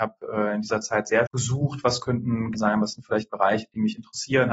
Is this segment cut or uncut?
cut